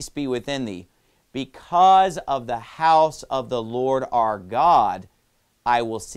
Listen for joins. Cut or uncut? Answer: uncut